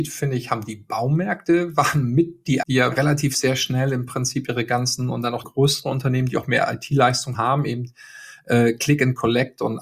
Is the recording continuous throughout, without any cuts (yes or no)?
no